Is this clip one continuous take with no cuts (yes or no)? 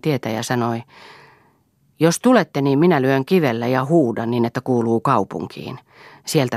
yes